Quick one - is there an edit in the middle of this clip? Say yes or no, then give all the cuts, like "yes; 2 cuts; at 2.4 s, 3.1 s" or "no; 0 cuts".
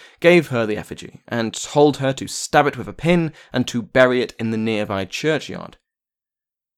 no; 0 cuts